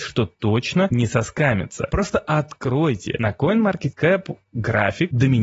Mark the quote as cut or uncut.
uncut